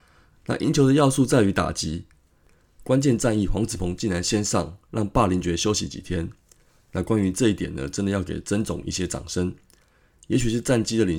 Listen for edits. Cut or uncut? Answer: uncut